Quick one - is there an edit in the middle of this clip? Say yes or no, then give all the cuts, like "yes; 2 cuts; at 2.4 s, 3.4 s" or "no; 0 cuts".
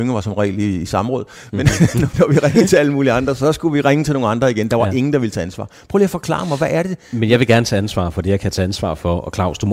yes; 1 cut; at 2.1 s